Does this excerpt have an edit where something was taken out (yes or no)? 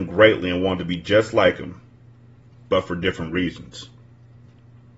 no